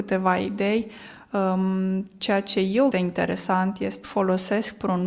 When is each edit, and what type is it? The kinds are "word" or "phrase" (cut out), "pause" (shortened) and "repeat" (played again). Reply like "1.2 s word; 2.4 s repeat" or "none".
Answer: 2.9 s phrase; 4.0 s phrase